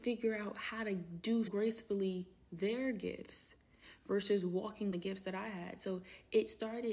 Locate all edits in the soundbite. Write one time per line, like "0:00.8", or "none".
0:01.5
0:04.9